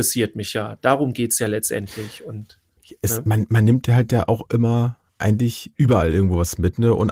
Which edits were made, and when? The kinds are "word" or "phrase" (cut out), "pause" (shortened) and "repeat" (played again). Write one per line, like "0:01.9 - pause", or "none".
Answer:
none

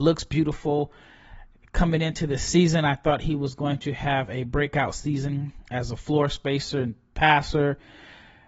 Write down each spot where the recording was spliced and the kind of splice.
none

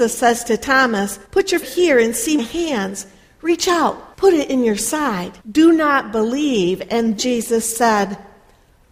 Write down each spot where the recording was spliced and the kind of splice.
0:01.2 - pause
0:01.6 - word
0:02.4 - word
0:04.1 - pause
0:05.4 - pause
0:07.2 - word

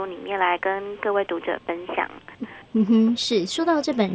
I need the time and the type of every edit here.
0:02.6 - pause

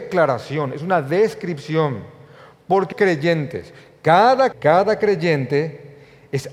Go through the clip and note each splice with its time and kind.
0:02.9 - word
0:04.5 - word

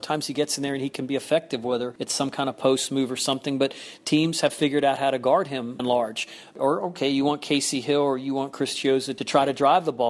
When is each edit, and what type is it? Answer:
0:05.8 - word

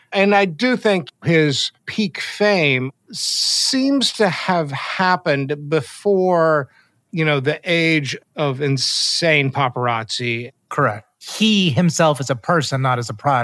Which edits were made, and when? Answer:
none

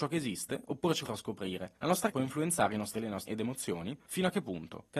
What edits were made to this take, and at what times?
0:01.1 - word
0:02.1 - word
0:03.0 - word
0:03.3 - word

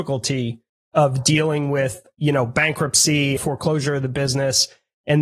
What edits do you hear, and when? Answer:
0:03.4 - word

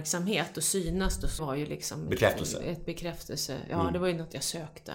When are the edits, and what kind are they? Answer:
0:01.4 - phrase

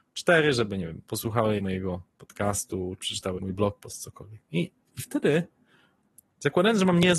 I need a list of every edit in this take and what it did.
0:01.6 - word
0:03.0 - word
0:03.4 - word

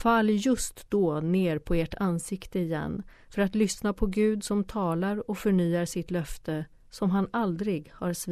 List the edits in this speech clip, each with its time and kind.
none

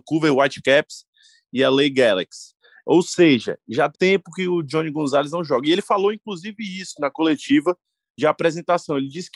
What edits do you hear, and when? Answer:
0:03.9 - word

